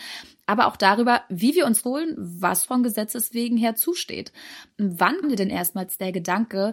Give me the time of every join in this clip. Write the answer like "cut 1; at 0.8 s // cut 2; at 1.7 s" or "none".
cut 1; at 1.8 s // cut 2; at 2.7 s // cut 3; at 5.2 s